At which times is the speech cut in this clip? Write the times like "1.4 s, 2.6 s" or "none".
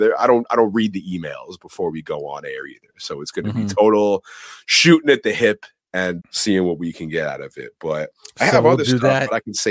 6.2 s